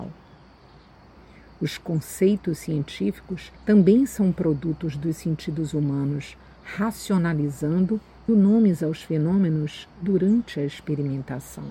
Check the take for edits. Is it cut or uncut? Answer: cut